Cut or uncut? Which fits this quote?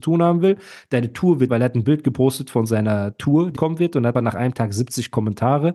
cut